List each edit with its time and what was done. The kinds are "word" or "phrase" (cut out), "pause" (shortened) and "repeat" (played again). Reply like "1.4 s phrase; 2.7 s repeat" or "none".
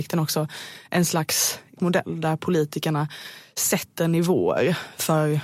1.8 s word